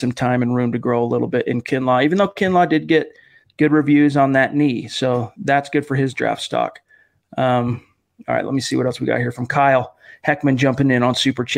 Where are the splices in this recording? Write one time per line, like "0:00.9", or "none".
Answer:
none